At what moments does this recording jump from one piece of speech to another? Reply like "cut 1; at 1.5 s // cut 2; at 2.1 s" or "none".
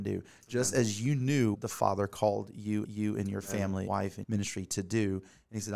cut 1; at 1.5 s // cut 2; at 2.8 s // cut 3; at 3.9 s // cut 4; at 4.2 s